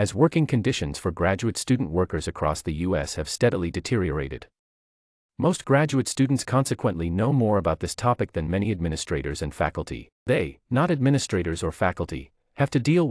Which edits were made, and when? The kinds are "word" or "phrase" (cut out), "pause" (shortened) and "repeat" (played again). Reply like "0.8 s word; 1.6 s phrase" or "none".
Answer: 10.1 s pause